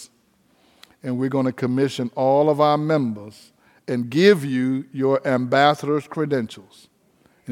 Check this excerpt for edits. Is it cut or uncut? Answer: uncut